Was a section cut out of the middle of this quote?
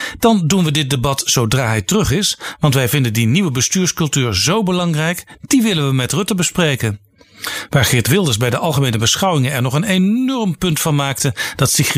no; 0 cuts

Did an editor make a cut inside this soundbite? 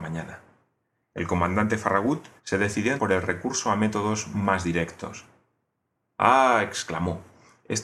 yes; 2 cuts; at 2.4 s, 3.0 s

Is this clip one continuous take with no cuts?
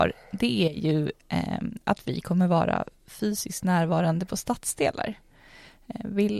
yes; 0 cuts

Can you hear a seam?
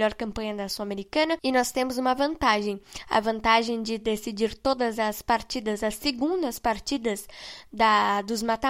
no; 0 cuts

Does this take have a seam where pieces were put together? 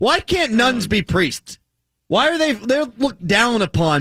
no; 0 cuts

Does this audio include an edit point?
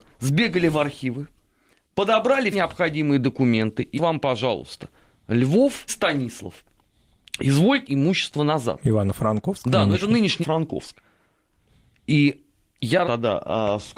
yes; 6 cuts; at 2.5 s, 3.9 s, 5.9 s, 7.8 s, 10.4 s, 13.0 s

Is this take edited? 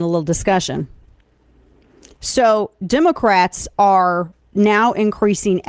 no; 0 cuts

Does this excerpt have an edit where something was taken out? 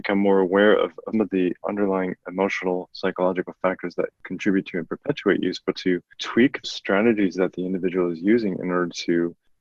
yes; 4 cuts; at 1.1 s, 1.6 s, 5.7 s, 6.6 s

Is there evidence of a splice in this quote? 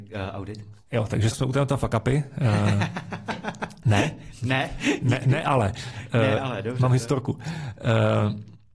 yes; 1 cut; at 1.3 s

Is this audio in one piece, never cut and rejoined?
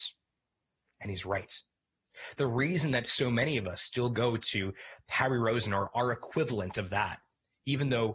yes; 0 cuts

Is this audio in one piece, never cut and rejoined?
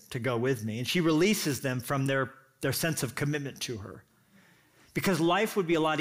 yes; 0 cuts

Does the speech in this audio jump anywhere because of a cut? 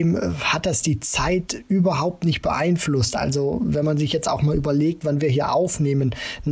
no; 0 cuts

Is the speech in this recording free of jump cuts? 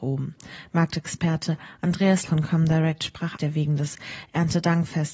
no; 2 cuts; at 2.2 s, 3.4 s

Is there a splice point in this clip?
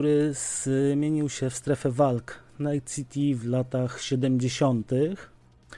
no; 0 cuts

